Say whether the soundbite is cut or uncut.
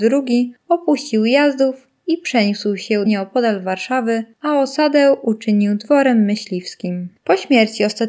cut